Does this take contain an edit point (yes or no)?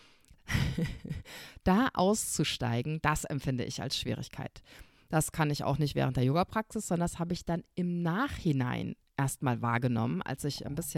no